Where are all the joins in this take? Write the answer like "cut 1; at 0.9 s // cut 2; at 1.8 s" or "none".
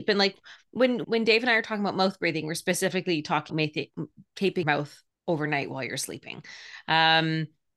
cut 1; at 1.0 s // cut 2; at 3.5 s // cut 3; at 4.6 s // cut 4; at 5.1 s